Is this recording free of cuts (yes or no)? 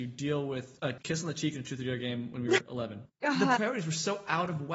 yes